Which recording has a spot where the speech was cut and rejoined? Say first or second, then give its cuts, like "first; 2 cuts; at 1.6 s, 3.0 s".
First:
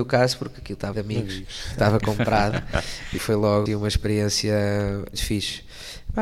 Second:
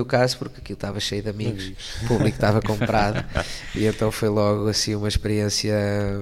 first; 5 cuts; at 0.9 s, 1.7 s, 3.2 s, 3.7 s, 5.1 s